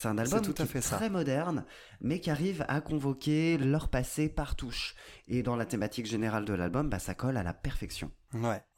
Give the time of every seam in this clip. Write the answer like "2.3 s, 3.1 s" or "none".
none